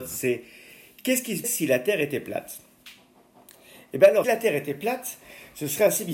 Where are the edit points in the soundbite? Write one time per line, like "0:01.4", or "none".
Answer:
0:01.4
0:04.2